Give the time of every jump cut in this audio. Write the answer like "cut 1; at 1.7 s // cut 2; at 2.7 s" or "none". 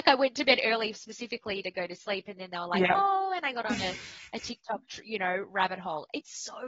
none